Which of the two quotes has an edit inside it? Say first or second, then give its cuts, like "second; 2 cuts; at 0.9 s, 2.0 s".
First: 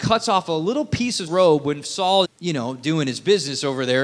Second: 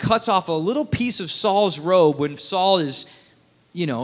first; 2 cuts; at 1.3 s, 2.2 s